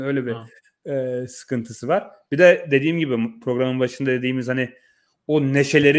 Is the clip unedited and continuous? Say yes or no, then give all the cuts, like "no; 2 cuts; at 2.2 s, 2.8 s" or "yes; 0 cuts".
yes; 0 cuts